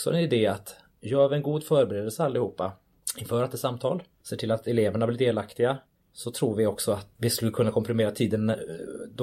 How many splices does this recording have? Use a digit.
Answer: 1